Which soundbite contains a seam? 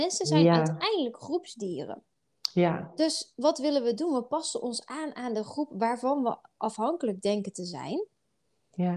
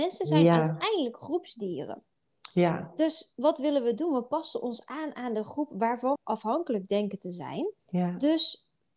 second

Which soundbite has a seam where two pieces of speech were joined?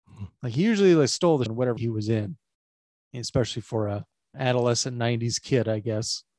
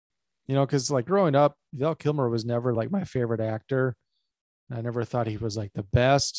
first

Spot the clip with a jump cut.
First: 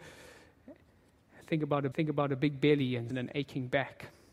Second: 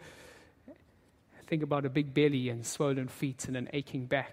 first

